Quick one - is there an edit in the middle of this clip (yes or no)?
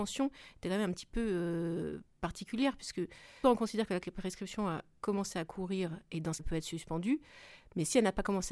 yes